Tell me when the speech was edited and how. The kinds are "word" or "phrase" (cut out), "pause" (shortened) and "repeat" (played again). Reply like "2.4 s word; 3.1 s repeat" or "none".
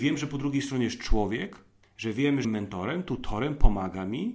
1.8 s pause; 2.4 s phrase